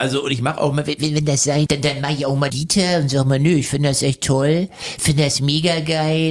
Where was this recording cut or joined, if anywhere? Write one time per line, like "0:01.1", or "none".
0:01.7
0:02.5